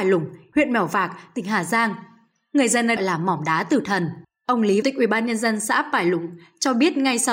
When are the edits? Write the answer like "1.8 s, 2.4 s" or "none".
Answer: 3.0 s, 4.2 s, 4.8 s